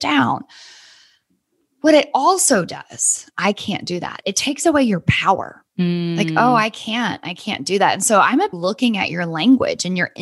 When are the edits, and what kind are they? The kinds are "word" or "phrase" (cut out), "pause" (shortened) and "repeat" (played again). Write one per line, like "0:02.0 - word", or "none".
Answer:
0:05.7 - pause
0:08.5 - phrase